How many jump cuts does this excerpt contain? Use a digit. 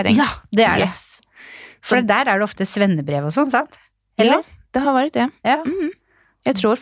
0